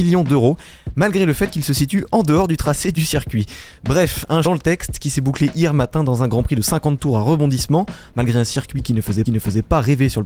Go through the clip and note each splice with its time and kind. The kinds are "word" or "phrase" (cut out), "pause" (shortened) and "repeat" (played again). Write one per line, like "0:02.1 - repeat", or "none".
0:04.4 - phrase
0:09.2 - repeat